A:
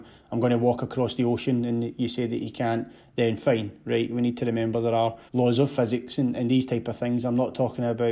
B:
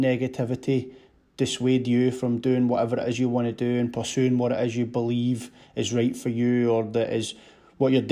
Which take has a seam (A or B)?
A